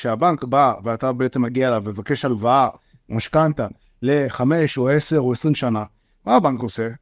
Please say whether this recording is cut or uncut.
uncut